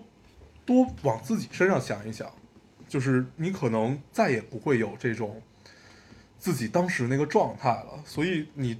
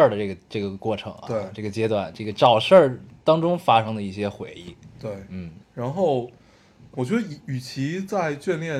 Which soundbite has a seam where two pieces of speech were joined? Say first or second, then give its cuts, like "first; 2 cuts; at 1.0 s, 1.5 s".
second; 2 cuts; at 5.6 s, 6.9 s